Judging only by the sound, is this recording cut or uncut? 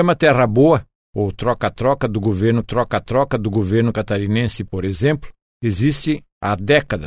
cut